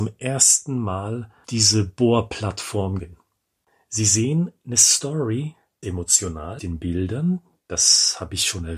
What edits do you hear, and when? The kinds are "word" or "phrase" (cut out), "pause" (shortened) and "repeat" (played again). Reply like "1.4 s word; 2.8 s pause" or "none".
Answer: 1.4 s word; 3.0 s word; 5.8 s word; 6.6 s word